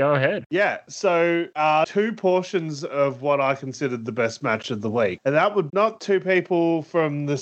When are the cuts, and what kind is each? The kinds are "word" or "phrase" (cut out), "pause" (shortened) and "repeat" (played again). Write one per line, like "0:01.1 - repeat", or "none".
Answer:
0:05.7 - word